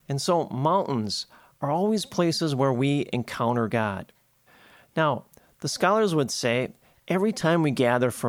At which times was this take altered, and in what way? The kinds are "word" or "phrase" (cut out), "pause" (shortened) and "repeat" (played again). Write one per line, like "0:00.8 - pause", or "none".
none